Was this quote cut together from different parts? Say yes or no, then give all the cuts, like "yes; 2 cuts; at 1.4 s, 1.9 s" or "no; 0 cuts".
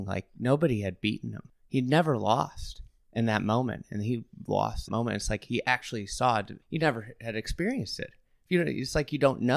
yes; 3 cuts; at 1.5 s, 4.9 s, 6.6 s